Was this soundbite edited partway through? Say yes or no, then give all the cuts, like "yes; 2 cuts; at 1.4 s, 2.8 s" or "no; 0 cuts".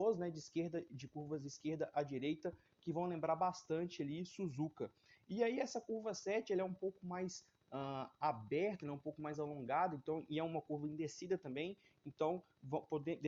no; 0 cuts